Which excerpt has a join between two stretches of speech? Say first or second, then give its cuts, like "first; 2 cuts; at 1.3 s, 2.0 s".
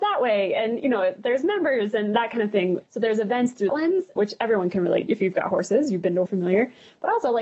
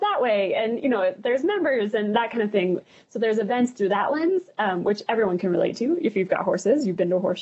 first; 5 cuts; at 2.9 s, 3.7 s, 4.2 s, 5.1 s, 6.3 s